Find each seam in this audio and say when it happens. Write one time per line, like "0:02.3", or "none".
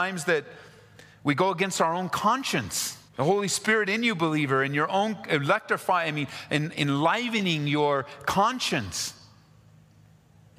0:03.1

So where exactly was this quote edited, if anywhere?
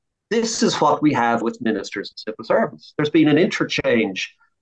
0:01.4

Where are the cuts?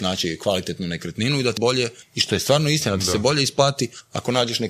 0:01.6

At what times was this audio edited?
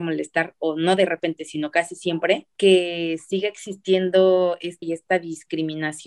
0:02.5
0:04.8

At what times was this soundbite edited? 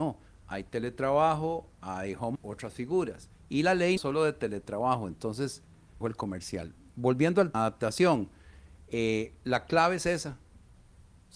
0:02.3
0:03.3
0:04.0
0:06.0
0:07.5

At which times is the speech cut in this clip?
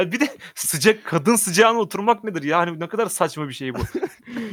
none

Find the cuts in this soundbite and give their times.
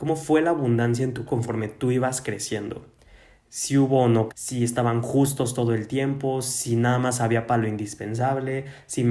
0:01.3
0:04.3

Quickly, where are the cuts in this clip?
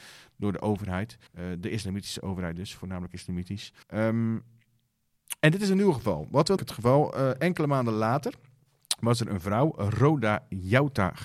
0:01.3
0:03.8
0:06.6

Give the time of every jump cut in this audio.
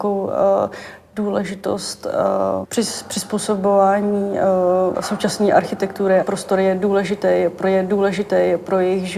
0:02.6
0:04.9
0:06.2
0:07.6

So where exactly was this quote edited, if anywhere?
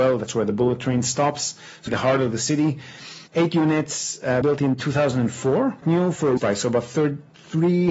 0:01.9
0:03.3
0:04.4
0:05.8
0:06.4

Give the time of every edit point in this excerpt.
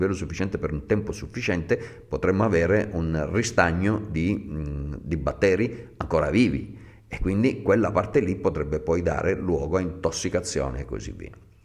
none

